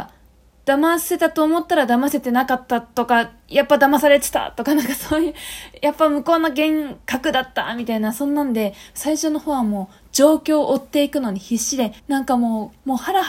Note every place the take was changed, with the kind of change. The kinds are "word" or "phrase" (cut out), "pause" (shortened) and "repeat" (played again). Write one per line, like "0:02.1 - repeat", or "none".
0:12.0 - pause